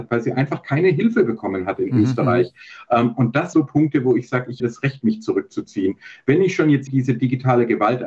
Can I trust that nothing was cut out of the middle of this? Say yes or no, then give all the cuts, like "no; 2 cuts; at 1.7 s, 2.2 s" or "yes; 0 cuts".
no; 3 cuts; at 3.5 s, 4.6 s, 6.9 s